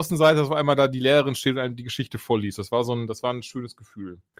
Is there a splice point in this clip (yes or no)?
no